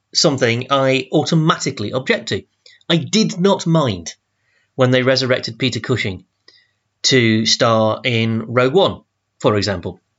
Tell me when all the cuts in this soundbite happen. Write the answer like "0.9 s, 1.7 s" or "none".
none